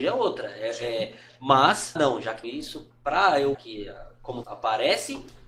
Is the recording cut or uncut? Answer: cut